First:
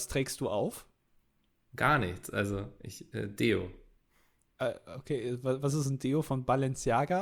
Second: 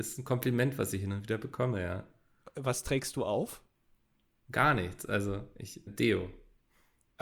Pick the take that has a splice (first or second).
second